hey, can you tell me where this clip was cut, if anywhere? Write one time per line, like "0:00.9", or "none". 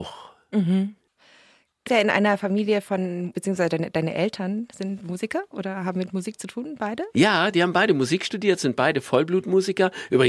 0:01.9
0:03.3
0:05.0